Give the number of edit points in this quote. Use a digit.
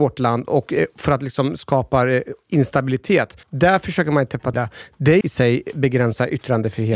3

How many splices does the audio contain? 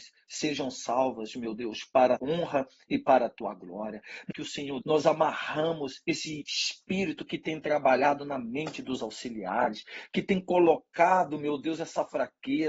3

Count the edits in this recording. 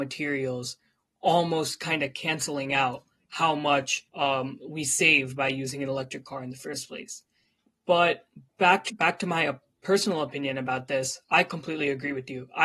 3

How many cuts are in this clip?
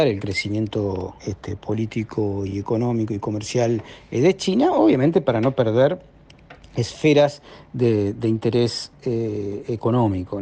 1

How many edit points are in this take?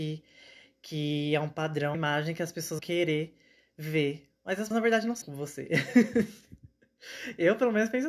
4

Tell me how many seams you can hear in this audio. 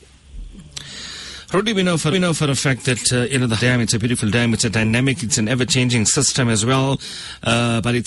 2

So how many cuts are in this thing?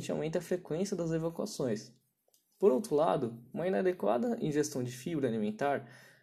0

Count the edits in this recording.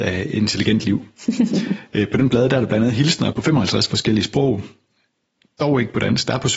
1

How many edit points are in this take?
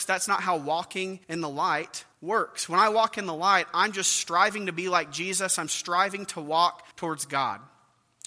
3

